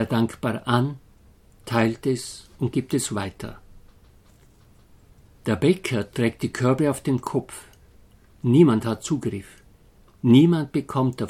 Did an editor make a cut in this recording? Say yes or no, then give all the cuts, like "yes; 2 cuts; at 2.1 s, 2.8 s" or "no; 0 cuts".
no; 0 cuts